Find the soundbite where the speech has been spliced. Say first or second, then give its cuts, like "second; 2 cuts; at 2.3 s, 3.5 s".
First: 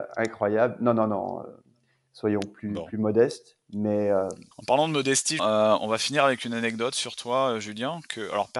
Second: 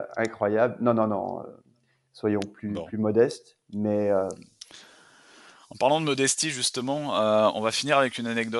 first; 2 cuts; at 4.5 s, 5.4 s